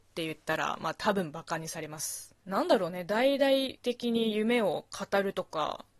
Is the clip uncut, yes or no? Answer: no